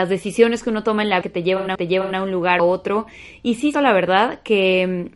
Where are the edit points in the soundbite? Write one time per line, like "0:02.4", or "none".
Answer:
0:01.2
0:01.8
0:02.6
0:03.7

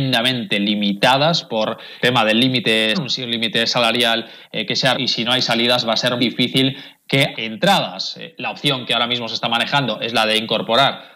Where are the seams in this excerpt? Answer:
0:02.0
0:02.9
0:04.9
0:06.2
0:07.3

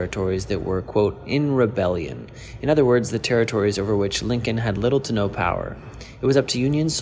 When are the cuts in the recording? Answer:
none

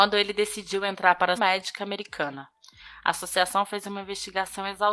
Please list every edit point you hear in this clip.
0:01.4

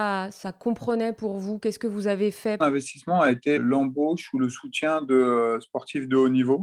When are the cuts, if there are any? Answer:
0:02.6
0:03.6

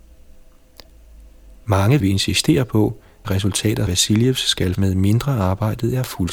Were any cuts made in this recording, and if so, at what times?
0:02.0
0:03.2
0:03.9
0:04.7

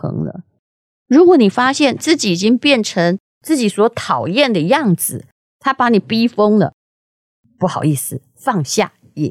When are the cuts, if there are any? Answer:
none

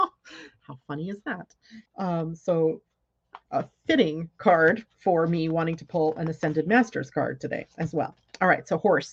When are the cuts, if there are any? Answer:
0:01.9

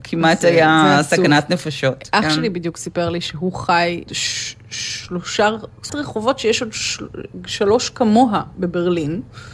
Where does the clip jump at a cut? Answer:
0:04.1
0:05.9

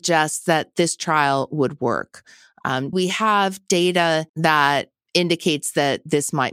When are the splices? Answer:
0:02.9
0:04.3

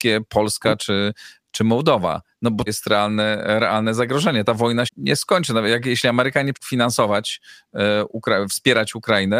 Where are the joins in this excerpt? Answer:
0:02.7
0:04.9
0:06.5

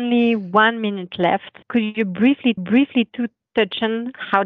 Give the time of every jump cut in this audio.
0:01.6
0:02.6

